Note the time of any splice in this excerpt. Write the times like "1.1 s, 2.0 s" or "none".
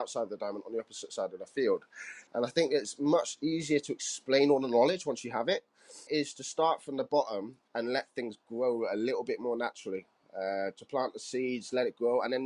2.3 s, 6.1 s

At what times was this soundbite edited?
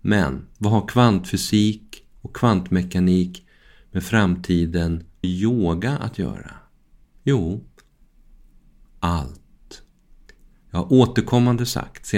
5.2 s

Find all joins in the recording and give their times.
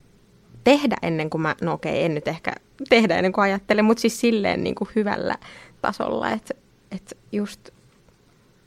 7.3 s

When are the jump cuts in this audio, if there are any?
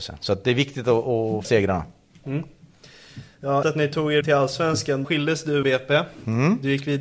1.4 s, 3.6 s, 4.2 s, 5.0 s, 5.6 s

